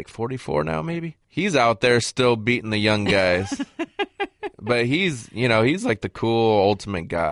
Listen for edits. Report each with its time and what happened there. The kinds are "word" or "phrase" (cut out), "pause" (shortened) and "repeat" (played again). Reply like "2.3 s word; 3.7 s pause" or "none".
none